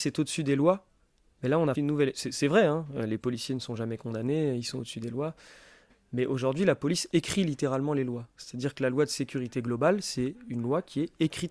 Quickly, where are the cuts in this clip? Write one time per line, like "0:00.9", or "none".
0:01.8